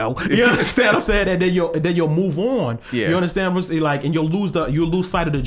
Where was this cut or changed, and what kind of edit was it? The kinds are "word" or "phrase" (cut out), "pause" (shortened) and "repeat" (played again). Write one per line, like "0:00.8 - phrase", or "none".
none

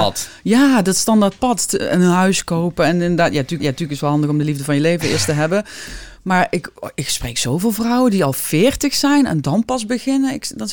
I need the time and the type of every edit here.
0:03.6 - repeat

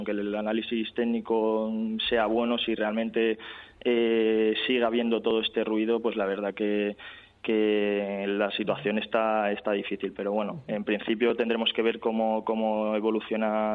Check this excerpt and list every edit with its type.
none

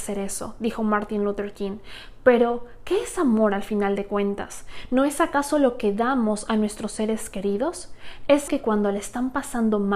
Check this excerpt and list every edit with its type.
0:08.5 - word

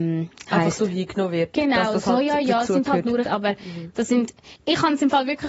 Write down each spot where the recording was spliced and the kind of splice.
0:03.3 - phrase
0:04.6 - word

